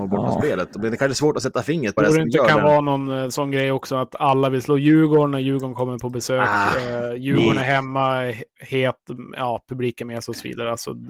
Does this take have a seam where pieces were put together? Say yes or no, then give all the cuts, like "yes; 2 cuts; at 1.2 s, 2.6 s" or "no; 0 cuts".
yes; 1 cut; at 2.0 s